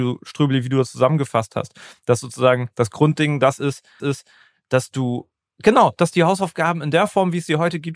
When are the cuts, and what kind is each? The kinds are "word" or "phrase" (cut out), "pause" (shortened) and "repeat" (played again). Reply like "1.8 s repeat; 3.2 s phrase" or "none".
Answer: 4.0 s repeat